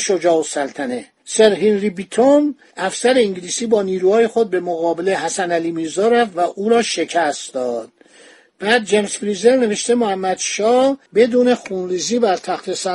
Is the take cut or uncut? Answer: cut